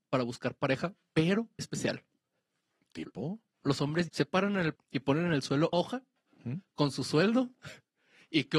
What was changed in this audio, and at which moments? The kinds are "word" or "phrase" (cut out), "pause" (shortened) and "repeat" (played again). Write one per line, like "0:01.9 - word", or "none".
0:01.6 - word
0:04.1 - word
0:04.7 - word
0:05.7 - word